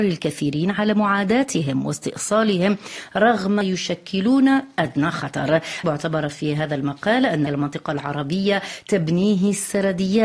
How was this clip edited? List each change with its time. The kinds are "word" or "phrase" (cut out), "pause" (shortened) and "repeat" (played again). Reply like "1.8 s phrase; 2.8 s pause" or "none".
3.6 s phrase; 5.8 s word; 7.5 s word